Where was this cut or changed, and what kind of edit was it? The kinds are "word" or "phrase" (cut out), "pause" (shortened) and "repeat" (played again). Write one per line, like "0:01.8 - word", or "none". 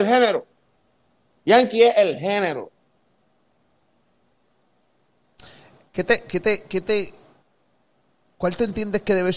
none

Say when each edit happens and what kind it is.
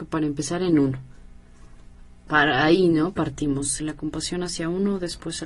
0:03.8 - word

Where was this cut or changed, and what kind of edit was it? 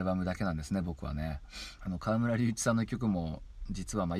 0:01.8 - phrase

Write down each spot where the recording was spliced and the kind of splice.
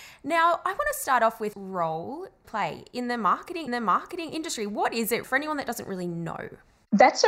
0:01.5 - word
0:02.4 - phrase
0:03.7 - repeat
0:05.2 - word

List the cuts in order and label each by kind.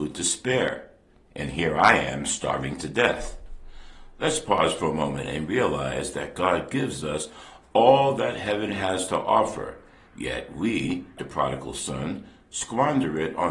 0:11.2 - word

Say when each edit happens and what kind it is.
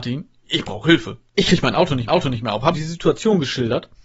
0:01.3 - pause
0:02.1 - repeat
0:02.7 - word

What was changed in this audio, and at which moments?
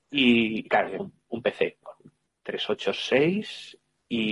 0:01.0 - word
0:01.8 - word

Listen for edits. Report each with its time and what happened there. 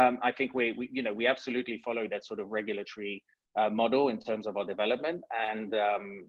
none

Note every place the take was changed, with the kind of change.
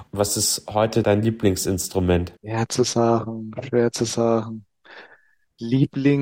0:02.4 - pause

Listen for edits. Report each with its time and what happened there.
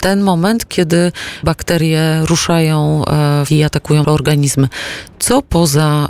0:01.4 - word
0:03.5 - word
0:04.0 - word

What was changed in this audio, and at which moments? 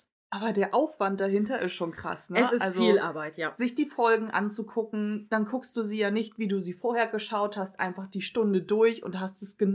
none

